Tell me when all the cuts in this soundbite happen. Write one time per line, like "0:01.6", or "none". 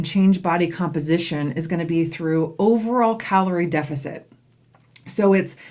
none